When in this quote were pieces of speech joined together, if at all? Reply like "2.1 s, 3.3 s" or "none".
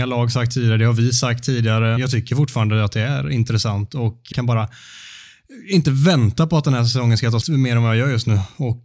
2.0 s, 4.3 s, 7.4 s

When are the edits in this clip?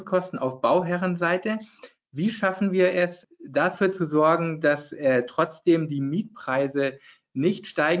none

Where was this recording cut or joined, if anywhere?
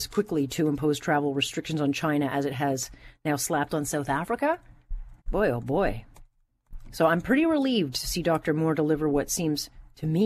5.2 s

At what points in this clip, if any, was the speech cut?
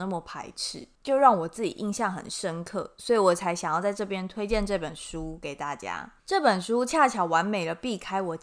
1.0 s, 6.2 s

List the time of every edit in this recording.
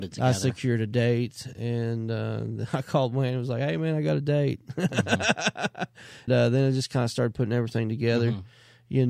6.3 s

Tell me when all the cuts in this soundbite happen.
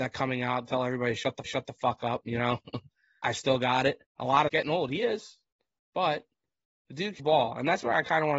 1.5 s, 3.2 s, 4.1 s, 4.5 s, 5.5 s, 7.2 s

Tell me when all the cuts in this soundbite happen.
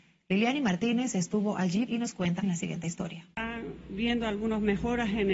1.9 s, 2.4 s, 3.3 s

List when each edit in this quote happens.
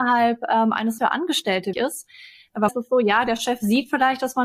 1.0 s, 1.7 s, 2.7 s

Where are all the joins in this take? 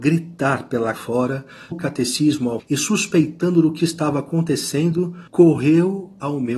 0.9 s, 1.7 s, 2.6 s, 3.8 s, 5.3 s

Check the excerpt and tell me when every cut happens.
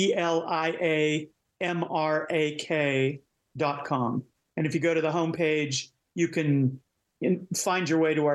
none

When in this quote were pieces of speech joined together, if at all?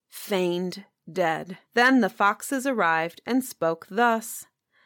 1.7 s

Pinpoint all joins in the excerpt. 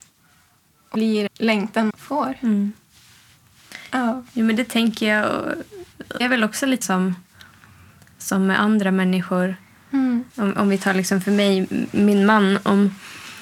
0.9 s, 1.3 s, 1.9 s, 6.2 s, 6.8 s, 10.3 s

